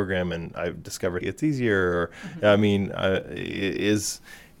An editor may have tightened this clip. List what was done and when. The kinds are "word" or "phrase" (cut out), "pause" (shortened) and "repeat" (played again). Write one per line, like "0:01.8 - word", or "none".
0:01.2 - word